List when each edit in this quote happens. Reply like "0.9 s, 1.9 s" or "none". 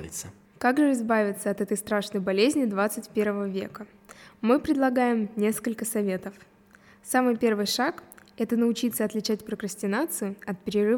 none